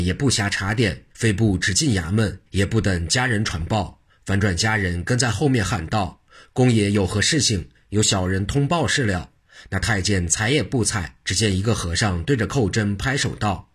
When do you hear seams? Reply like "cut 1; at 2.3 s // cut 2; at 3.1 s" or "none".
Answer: cut 1; at 1.1 s // cut 2; at 2.5 s // cut 3; at 11.2 s